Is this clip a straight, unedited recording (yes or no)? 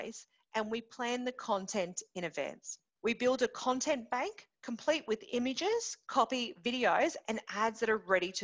yes